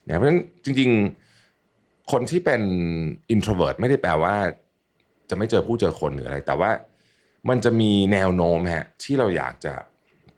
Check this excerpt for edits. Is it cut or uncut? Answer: uncut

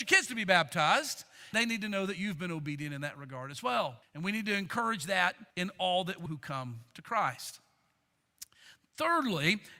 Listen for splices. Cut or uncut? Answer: cut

